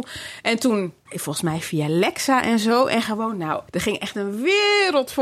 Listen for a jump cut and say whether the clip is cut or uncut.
cut